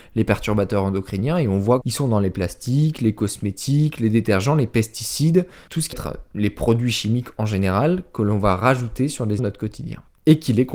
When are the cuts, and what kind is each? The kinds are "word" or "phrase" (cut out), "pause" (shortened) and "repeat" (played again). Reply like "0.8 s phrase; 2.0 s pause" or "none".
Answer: 1.8 s phrase; 5.9 s word; 9.4 s word